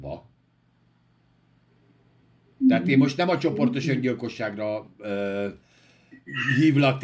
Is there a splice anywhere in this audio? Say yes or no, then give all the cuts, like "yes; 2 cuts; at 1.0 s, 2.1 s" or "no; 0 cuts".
no; 0 cuts